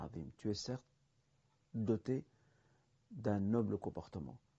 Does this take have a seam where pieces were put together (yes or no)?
no